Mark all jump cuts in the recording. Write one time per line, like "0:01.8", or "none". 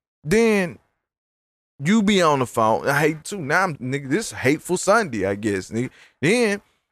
0:03.2
0:03.7